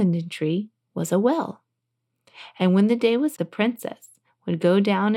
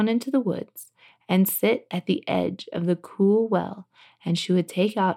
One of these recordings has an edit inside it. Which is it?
first; 1 cut; at 3.4 s

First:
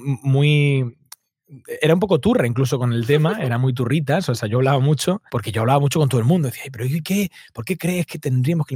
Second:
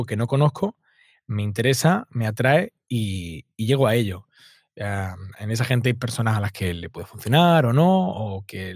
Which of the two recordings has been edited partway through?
first; 2 cuts; at 5.3 s, 7.0 s

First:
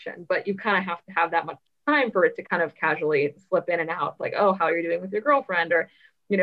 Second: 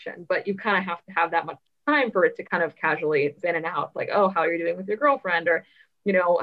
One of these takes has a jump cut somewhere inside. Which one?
second; 1 cut; at 3.4 s

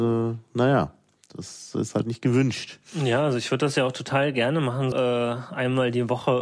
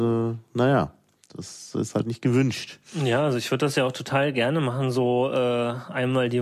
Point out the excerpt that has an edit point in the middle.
first; 1 cut; at 4.9 s

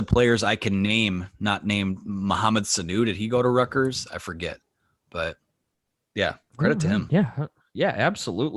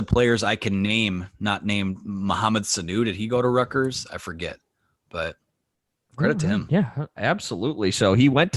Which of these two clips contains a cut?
second; 2 cuts; at 6.0 s, 7.2 s

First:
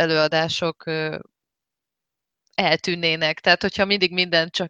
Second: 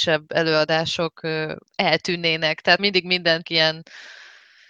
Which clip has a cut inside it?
second; 3 cuts; at 1.7 s, 2.8 s, 3.4 s

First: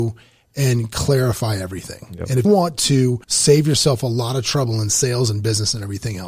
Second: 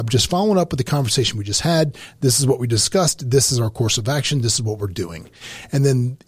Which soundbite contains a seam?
first; 2 cuts; at 2.4 s, 3.2 s

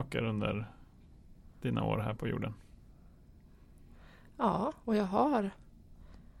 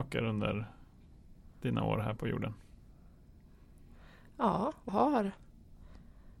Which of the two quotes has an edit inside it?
second; 1 cut; at 4.9 s

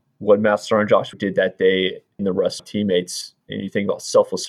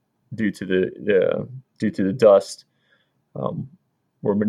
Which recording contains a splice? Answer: first; 4 cuts; at 1.1 s, 2.2 s, 2.6 s, 3.4 s

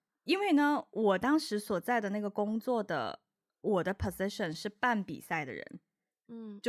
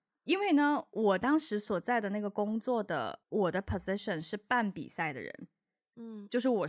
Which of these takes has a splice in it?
second; 1 cut; at 3.2 s

